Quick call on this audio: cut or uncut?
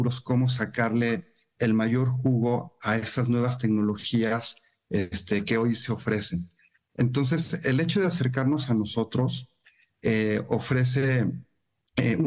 uncut